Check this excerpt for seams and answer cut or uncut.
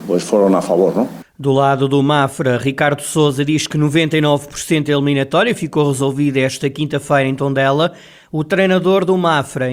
uncut